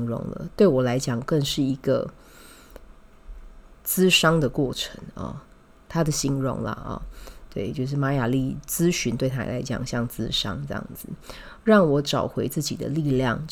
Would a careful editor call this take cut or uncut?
uncut